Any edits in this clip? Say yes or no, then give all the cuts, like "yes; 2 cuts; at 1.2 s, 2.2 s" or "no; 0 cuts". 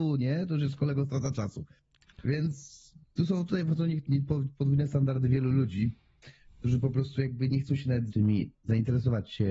yes; 1 cut; at 8.1 s